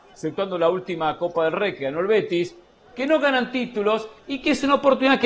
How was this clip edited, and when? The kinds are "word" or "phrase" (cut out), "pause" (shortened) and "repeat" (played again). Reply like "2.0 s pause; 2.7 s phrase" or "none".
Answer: none